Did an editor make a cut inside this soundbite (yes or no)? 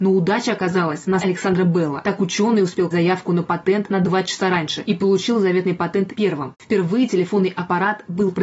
yes